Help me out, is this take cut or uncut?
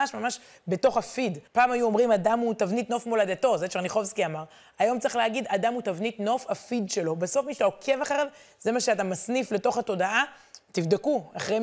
cut